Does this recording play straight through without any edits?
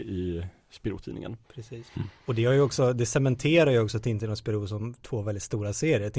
no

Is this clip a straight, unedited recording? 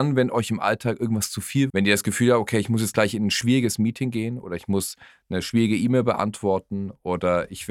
no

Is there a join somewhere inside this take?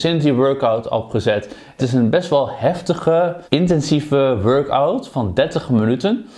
yes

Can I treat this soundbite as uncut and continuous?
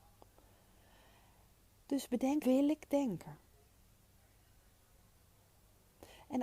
no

